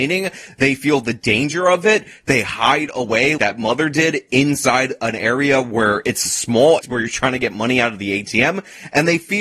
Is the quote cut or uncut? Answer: cut